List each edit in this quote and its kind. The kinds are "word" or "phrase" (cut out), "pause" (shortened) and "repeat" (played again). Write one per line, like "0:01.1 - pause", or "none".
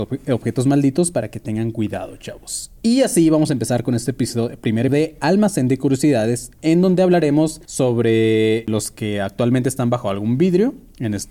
0:04.9 - word
0:07.6 - pause

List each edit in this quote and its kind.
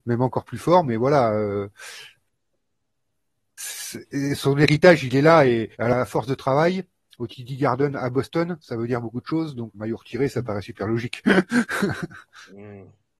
0:05.7 - pause
0:09.7 - word

